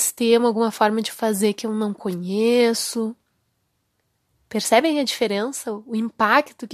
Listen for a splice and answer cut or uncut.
uncut